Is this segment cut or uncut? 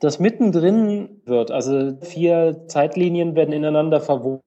cut